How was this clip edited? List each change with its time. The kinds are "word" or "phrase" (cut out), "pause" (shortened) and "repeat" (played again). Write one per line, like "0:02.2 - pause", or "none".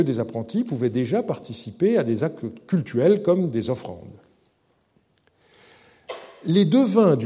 none